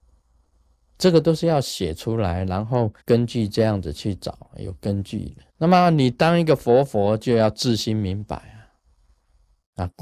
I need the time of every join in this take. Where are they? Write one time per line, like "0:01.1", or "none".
0:03.0
0:05.5